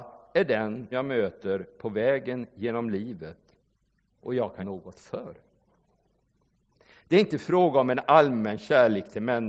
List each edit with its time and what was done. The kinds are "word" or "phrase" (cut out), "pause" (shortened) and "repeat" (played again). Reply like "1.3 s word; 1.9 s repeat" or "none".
0.9 s word; 4.6 s word